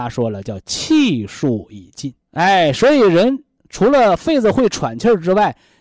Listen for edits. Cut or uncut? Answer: cut